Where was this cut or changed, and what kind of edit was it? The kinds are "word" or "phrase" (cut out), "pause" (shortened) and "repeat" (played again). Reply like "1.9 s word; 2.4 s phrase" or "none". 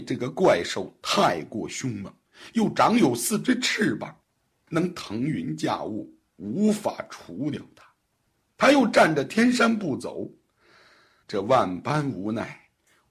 11.2 s word

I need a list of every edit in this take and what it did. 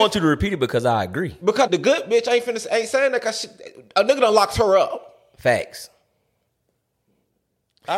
1.7 s word

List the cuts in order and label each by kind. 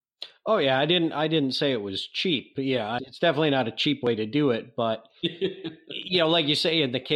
3.0 s word

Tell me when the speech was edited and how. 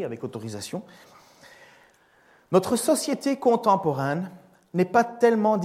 none

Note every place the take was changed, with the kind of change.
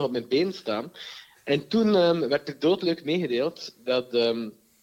none

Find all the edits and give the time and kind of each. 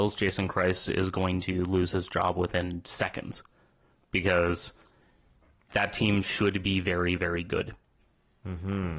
none

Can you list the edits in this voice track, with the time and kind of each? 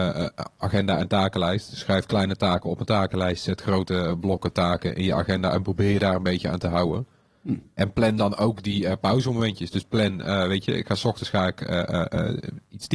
none

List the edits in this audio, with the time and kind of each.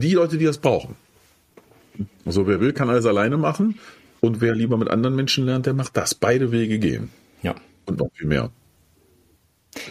none

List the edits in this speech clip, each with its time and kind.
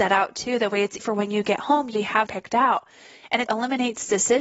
1.0 s word; 1.9 s word; 2.3 s word; 3.5 s word

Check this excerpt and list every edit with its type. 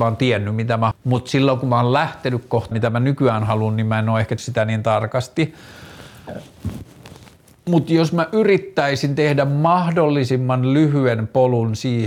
0.9 s word; 2.7 s word; 4.4 s word

